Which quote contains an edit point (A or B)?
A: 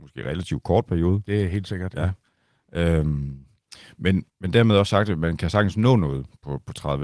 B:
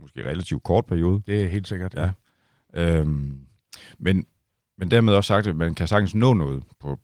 A